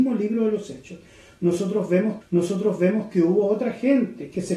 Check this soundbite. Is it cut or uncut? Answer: cut